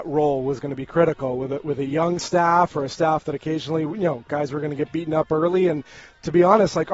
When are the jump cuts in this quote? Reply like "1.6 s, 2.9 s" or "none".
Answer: none